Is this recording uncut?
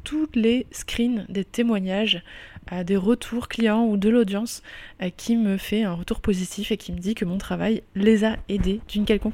yes; 0 cuts

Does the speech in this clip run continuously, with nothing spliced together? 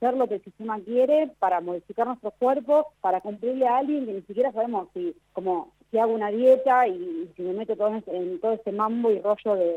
no; 2 cuts; at 2.9 s, 5.2 s

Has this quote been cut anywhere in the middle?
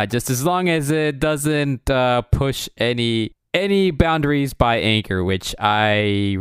no; 0 cuts

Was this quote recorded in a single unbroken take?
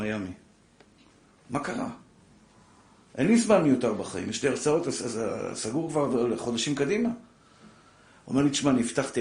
yes; 0 cuts

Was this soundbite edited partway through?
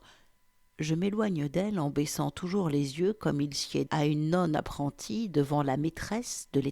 yes; 1 cut; at 3.9 s

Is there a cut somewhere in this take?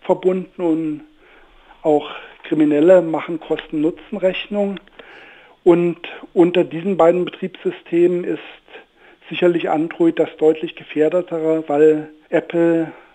no; 0 cuts

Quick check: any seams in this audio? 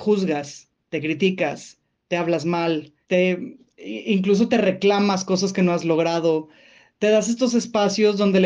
yes; 1 cut; at 3.0 s

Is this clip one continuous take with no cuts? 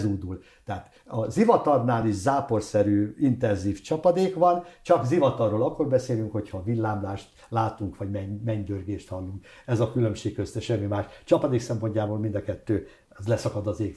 yes; 0 cuts

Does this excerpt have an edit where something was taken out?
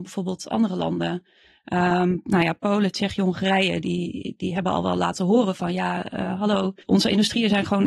yes; 1 cut; at 6.8 s

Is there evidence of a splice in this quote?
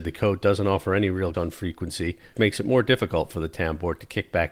yes; 2 cuts; at 1.3 s, 2.4 s

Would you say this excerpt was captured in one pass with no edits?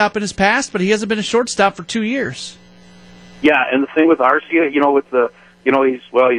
yes; 0 cuts

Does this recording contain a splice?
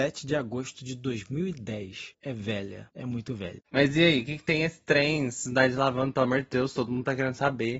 yes; 1 cut; at 3.6 s

